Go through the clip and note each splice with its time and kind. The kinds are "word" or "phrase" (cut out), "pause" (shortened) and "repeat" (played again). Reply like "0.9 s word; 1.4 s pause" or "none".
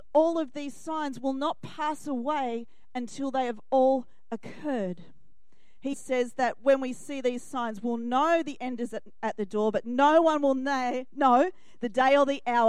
5.9 s word